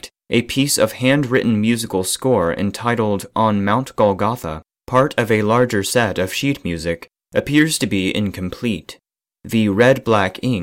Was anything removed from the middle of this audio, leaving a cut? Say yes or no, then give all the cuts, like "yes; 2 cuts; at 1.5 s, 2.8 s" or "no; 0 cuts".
no; 0 cuts